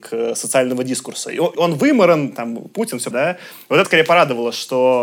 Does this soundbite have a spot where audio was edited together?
yes; 3 cuts; at 1.5 s, 3.1 s, 3.8 s

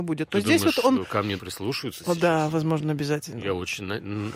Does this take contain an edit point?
yes; 1 cut; at 1.4 s

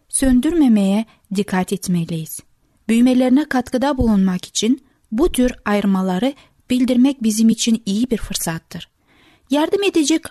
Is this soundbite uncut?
yes; 0 cuts

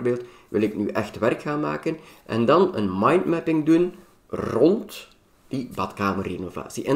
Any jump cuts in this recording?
no; 0 cuts

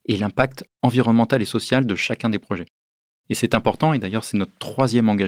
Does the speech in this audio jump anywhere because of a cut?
no; 0 cuts

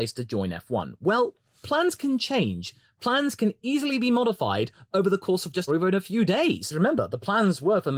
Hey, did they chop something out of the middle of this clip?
yes; 1 cut; at 5.7 s

